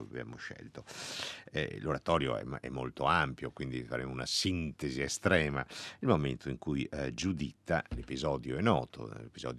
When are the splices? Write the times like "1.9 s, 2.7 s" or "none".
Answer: none